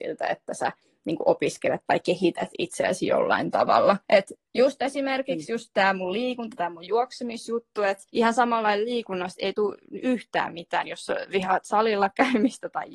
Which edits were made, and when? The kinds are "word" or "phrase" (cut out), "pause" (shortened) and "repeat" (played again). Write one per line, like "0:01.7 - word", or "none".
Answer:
0:04.0 - pause
0:08.1 - pause